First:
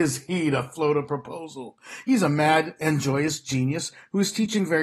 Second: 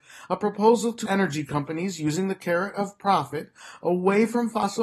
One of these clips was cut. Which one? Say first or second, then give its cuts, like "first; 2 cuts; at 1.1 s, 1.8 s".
second; 1 cut; at 1.1 s